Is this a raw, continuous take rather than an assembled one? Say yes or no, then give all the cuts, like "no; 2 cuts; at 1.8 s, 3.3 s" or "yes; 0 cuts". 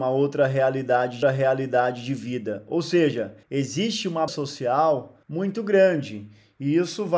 no; 4 cuts; at 1.2 s, 3.4 s, 4.3 s, 5.2 s